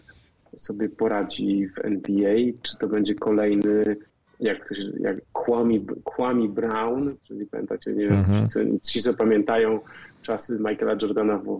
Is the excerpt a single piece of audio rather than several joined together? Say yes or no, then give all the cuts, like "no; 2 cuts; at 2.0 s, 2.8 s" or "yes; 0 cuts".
no; 2 cuts; at 4.1 s, 7.2 s